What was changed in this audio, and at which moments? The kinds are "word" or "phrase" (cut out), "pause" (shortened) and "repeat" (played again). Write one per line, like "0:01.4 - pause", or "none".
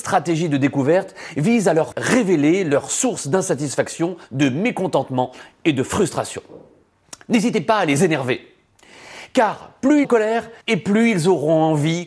0:01.9 - word
0:04.2 - pause
0:10.0 - word
0:10.6 - pause